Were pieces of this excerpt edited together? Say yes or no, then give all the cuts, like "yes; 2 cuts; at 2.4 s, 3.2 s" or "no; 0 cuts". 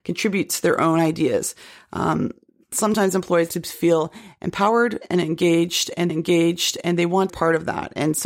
yes; 3 cuts; at 3.5 s, 6.1 s, 7.3 s